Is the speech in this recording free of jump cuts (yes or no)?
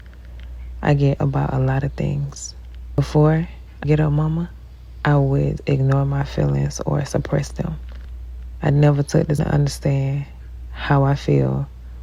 no